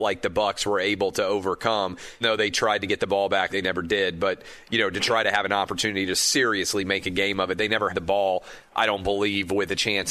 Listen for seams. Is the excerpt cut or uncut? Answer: cut